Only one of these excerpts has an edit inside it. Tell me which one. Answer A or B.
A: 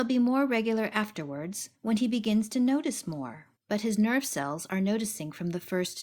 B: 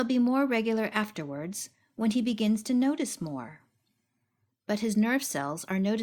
A